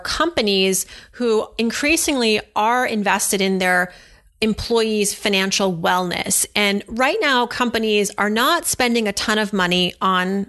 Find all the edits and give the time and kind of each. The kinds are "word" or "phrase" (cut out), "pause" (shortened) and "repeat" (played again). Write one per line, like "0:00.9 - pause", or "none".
none